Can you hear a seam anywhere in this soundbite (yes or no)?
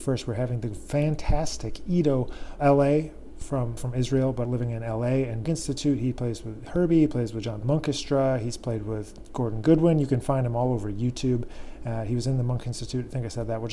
yes